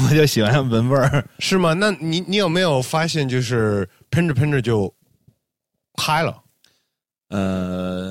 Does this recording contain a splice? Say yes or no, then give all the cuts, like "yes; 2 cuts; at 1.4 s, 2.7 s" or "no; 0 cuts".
no; 0 cuts